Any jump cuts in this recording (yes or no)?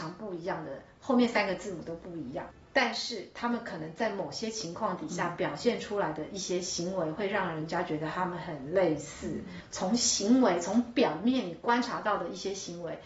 no